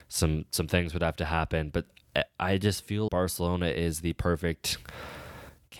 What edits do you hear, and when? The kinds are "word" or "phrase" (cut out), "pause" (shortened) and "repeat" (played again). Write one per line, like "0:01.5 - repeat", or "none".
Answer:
0:03.1 - word